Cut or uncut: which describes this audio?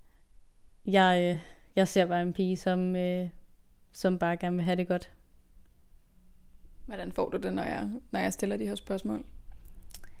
uncut